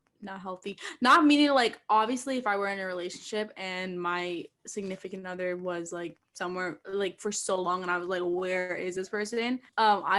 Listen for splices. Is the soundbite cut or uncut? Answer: uncut